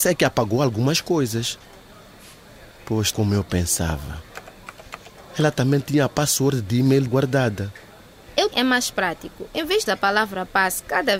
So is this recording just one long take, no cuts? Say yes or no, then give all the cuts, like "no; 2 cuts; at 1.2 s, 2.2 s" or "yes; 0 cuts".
no; 4 cuts; at 3.1 s, 7.1 s, 8.5 s, 9.9 s